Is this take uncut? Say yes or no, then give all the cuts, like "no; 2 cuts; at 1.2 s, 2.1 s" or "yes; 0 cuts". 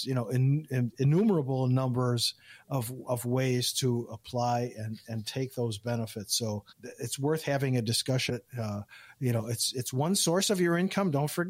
no; 2 cuts; at 6.7 s, 8.3 s